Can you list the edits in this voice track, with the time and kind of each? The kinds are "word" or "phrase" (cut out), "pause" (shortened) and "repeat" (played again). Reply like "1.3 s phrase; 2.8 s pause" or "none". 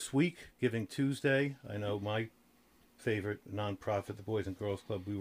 none